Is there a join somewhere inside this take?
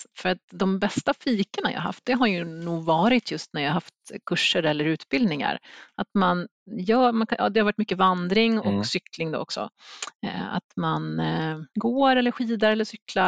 yes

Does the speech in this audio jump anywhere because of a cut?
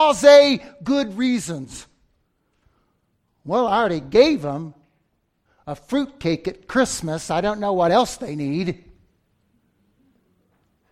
no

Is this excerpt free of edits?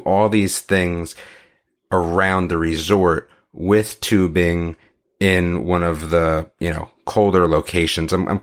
yes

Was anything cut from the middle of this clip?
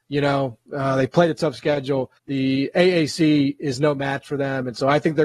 yes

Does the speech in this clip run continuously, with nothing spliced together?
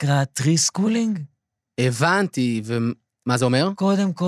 yes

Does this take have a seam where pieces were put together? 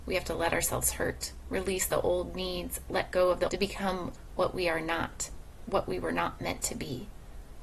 yes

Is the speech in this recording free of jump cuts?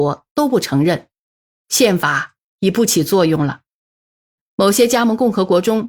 yes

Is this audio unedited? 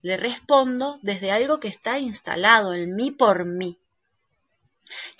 yes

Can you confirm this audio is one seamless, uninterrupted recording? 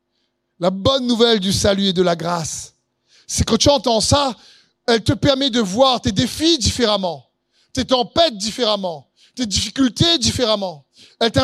yes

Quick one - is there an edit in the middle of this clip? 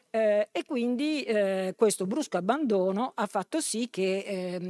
no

